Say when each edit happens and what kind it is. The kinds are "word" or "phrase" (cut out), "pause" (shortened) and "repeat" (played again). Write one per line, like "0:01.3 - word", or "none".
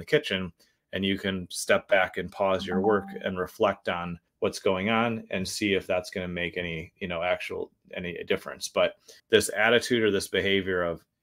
0:04.3 - pause
0:09.2 - pause